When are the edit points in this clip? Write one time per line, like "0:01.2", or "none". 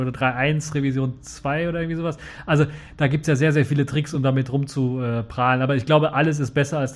none